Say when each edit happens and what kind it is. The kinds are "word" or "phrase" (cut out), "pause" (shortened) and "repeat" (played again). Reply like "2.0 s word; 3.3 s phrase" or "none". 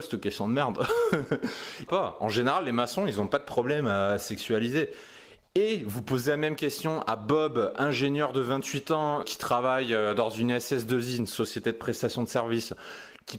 1.9 s phrase; 9.2 s word

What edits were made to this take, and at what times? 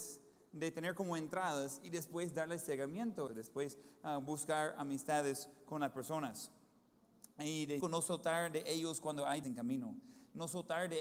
3.3 s word; 7.8 s word; 9.4 s word

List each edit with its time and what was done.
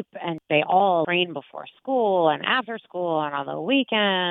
1.0 s word

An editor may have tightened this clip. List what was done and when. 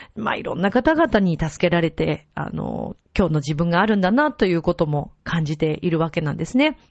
3.0 s pause

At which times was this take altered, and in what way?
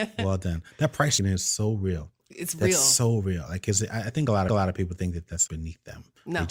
1.2 s word; 4.5 s repeat; 5.5 s word

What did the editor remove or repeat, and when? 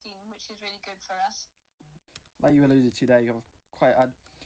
none

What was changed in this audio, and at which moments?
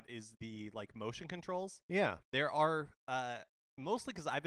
none

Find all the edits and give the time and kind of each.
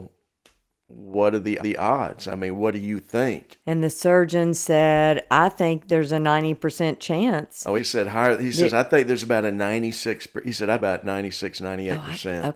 1.6 s repeat; 3.6 s pause; 7.8 s word; 10.8 s phrase

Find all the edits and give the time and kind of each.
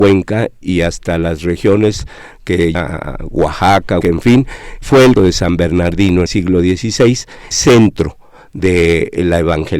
2.7 s word; 4.0 s word; 4.8 s word; 5.2 s word; 6.3 s word; 7.5 s word

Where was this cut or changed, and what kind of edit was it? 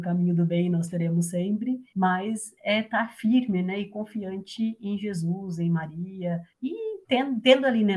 1.9 s pause; 6.5 s pause

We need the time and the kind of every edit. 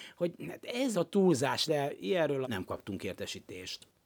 0.9 s word; 1.7 s word; 2.4 s word

